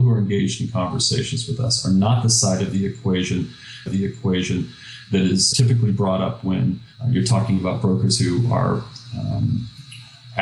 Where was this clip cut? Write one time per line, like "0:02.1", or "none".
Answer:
0:03.9
0:05.5
0:06.9